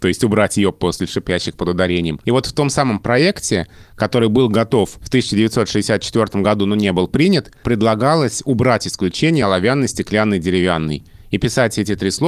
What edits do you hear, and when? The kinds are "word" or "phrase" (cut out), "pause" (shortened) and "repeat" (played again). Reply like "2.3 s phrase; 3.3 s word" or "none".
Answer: none